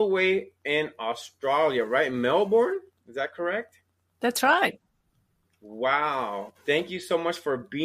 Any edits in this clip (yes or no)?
yes